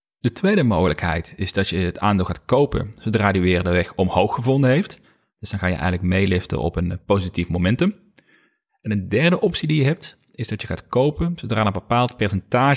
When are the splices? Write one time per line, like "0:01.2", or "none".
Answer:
none